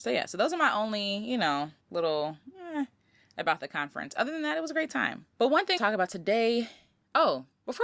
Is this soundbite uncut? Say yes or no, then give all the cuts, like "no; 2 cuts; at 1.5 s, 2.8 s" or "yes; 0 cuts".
no; 3 cuts; at 1.8 s, 5.3 s, 5.8 s